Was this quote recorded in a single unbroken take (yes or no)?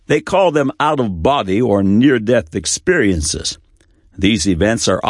yes